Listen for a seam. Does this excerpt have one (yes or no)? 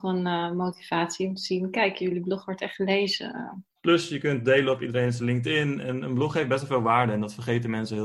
yes